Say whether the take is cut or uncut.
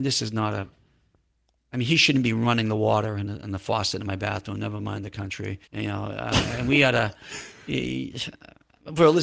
cut